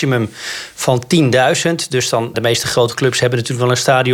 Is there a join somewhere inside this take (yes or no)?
yes